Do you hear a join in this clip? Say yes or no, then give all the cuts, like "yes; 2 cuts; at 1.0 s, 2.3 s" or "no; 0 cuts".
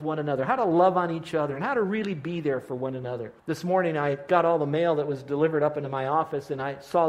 yes; 1 cut; at 3.4 s